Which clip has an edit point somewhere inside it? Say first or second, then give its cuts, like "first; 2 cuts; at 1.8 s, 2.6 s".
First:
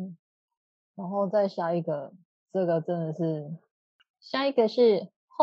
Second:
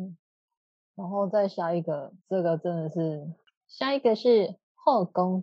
second; 2 cuts; at 2.2 s, 3.4 s